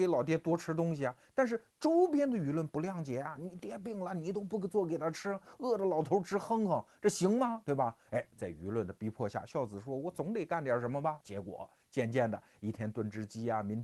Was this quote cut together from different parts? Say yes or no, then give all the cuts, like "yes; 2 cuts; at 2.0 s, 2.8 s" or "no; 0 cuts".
yes; 1 cut; at 11.2 s